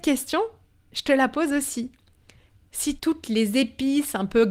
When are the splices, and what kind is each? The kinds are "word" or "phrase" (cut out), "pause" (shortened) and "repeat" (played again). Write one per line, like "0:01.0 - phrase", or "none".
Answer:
0:03.0 - word